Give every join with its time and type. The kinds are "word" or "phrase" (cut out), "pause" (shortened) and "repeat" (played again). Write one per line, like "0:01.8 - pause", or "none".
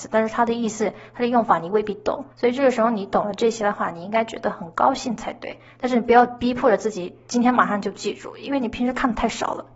0:02.3 - pause